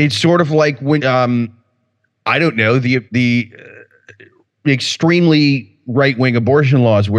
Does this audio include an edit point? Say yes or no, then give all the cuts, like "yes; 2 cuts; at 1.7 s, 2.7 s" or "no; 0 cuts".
yes; 2 cuts; at 1.0 s, 3.1 s